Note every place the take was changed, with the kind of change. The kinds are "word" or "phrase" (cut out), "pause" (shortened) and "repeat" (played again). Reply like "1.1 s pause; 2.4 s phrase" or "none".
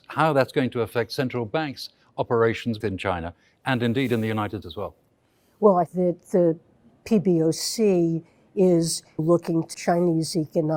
2.8 s word; 4.6 s word; 5.9 s word; 9.2 s word; 9.7 s word